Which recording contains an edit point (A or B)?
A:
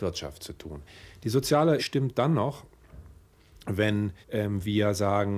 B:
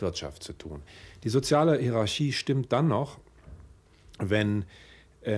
A